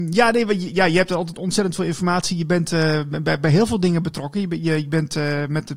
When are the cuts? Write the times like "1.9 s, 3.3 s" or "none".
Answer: none